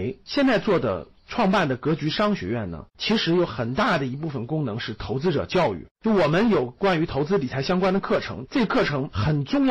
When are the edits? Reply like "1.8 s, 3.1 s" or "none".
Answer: 2.9 s, 5.9 s